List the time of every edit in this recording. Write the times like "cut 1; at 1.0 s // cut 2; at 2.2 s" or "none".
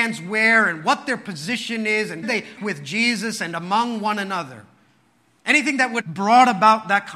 cut 1; at 2.2 s // cut 2; at 2.6 s // cut 3; at 6.0 s